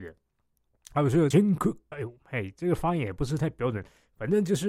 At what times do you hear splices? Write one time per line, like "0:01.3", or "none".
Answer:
0:01.3
0:01.9

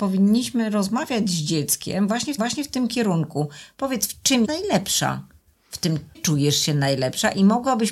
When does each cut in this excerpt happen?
0:02.4
0:04.4
0:06.1

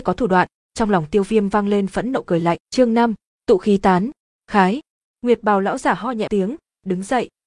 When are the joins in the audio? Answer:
0:02.6
0:06.3

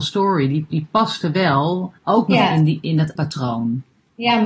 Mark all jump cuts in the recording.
0:02.0
0:03.2

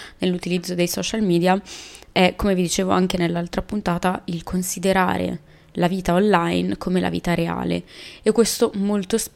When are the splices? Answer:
none

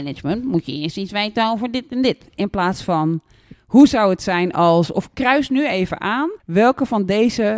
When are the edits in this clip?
0:06.4

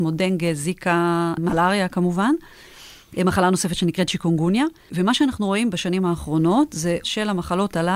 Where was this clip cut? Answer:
0:07.0

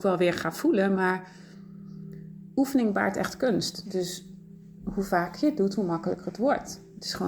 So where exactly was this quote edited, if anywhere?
none

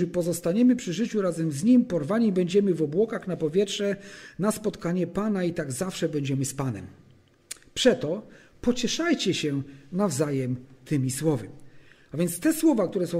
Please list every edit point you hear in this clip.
none

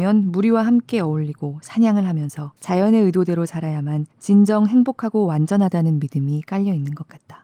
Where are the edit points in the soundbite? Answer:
0:02.6
0:04.1

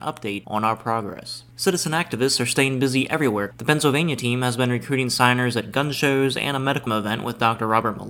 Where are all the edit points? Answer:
0:06.9

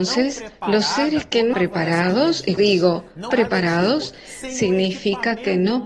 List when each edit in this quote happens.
0:01.5
0:02.6
0:03.3

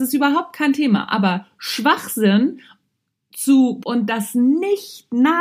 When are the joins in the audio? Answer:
0:03.8

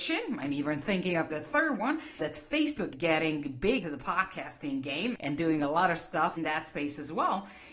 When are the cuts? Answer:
0:01.3
0:02.2
0:02.9
0:03.8
0:05.1
0:06.4

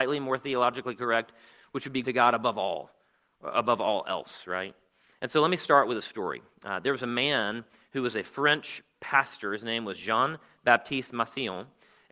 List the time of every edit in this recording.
0:02.0

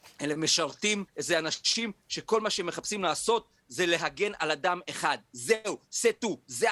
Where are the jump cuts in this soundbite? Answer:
0:01.1

